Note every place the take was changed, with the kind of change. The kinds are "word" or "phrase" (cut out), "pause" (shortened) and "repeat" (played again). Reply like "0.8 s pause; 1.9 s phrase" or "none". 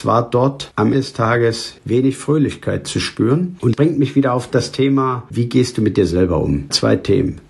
0.9 s word; 3.7 s word